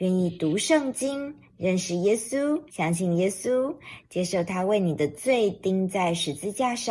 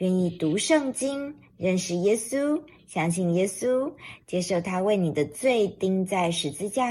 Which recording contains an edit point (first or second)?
first